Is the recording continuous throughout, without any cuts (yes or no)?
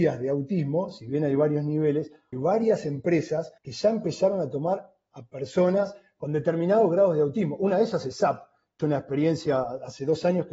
no